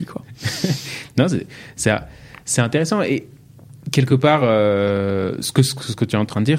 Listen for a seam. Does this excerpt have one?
no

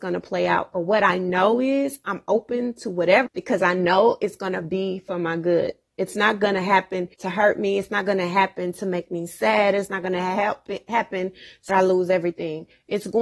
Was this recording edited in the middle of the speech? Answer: yes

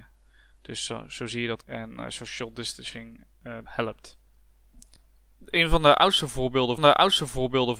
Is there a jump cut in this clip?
yes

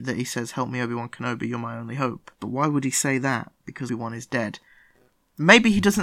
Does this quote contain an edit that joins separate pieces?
yes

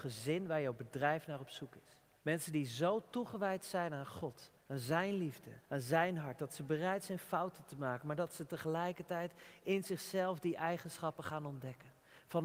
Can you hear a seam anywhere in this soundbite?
yes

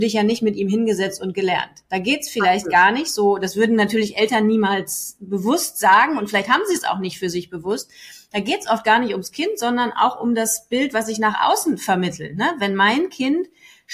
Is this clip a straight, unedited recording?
yes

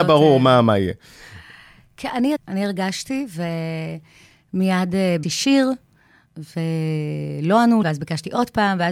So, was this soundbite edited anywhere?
yes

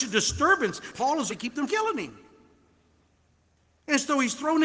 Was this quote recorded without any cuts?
no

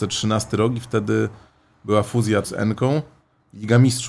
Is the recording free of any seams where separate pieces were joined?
no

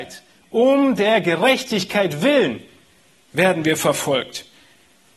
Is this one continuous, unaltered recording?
yes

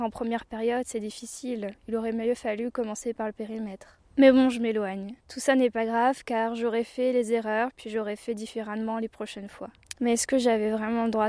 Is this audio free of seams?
no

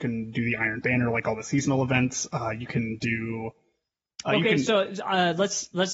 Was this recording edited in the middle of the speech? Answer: no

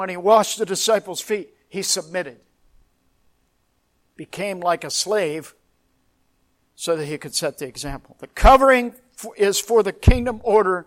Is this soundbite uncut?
yes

